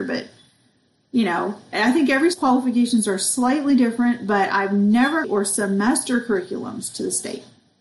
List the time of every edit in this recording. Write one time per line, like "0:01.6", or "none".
0:02.3
0:05.2